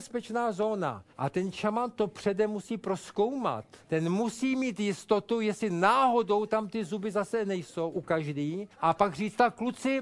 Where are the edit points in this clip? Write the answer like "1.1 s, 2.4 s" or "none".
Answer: 1.1 s, 3.8 s, 8.7 s